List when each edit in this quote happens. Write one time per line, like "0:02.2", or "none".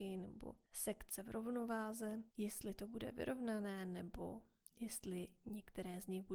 0:02.3